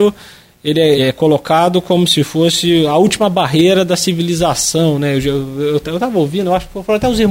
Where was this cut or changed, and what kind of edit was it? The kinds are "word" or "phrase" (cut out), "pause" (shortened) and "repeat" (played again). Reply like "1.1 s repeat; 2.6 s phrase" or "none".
1.0 s word